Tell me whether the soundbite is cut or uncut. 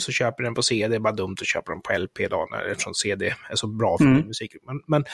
uncut